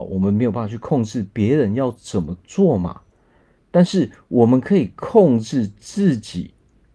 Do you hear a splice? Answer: no; 0 cuts

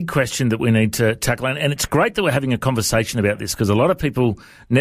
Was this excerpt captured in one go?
yes; 0 cuts

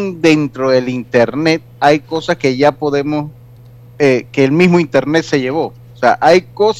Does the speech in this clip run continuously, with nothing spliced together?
yes; 0 cuts

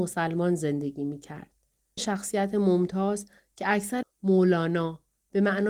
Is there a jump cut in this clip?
yes; 2 cuts; at 2.0 s, 4.0 s

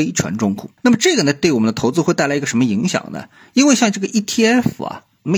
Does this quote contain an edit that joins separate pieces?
no; 0 cuts

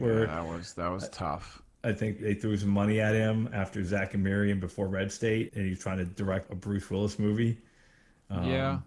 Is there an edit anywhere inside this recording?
yes; 3 cuts; at 2.2 s, 5.5 s, 6.5 s

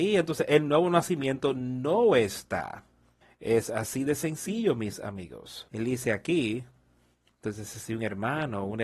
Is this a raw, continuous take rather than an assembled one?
no; 2 cuts; at 3.2 s, 5.7 s

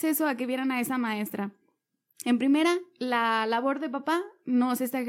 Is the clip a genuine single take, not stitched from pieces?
yes; 0 cuts

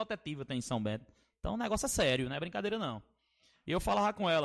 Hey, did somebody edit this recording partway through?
no; 0 cuts

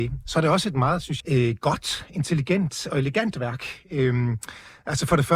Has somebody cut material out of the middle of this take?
yes; 1 cut; at 1.2 s

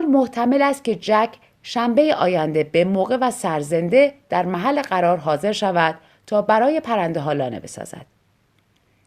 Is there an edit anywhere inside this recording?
no; 0 cuts

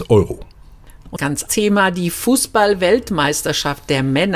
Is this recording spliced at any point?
yes; 2 cuts; at 1.2 s, 1.5 s

